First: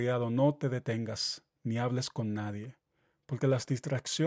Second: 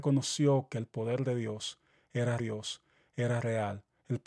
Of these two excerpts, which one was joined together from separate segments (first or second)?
second